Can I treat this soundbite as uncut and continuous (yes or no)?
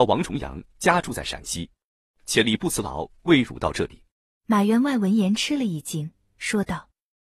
no